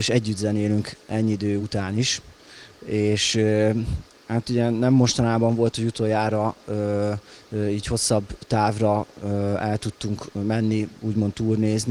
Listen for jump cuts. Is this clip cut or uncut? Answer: uncut